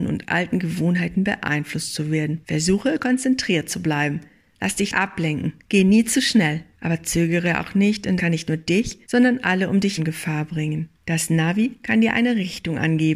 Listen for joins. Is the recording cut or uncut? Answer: cut